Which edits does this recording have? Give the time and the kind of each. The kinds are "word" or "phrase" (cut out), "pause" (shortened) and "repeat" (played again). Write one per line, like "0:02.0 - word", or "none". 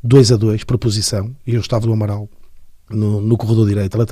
0:01.8 - word